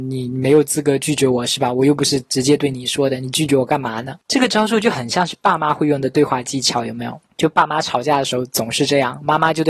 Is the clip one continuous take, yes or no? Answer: no